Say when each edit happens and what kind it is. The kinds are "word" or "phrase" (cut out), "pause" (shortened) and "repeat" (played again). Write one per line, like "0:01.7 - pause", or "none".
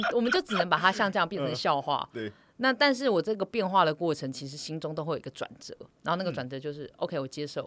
0:05.9 - pause